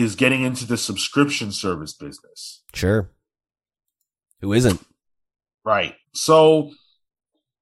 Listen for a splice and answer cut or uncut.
cut